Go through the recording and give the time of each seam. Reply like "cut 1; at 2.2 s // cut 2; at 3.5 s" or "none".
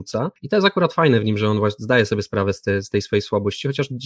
none